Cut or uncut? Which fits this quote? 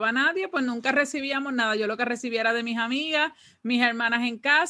uncut